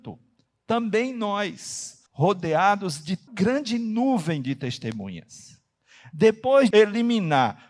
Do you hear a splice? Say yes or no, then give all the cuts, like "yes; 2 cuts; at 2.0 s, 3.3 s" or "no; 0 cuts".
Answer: yes; 3 cuts; at 2.1 s, 3.3 s, 6.7 s